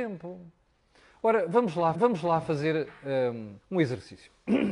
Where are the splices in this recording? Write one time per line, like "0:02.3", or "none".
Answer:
0:01.9
0:03.6